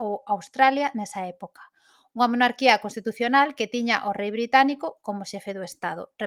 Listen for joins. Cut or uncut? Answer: uncut